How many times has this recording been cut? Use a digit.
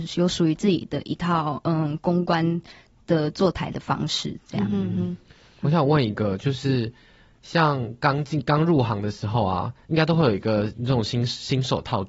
0